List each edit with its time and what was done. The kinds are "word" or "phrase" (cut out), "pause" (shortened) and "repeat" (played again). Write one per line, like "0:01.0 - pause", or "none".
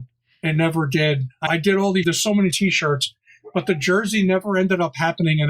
0:01.5 - word
0:02.0 - word
0:02.5 - word